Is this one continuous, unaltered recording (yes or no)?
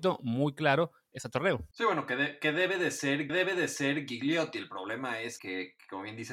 no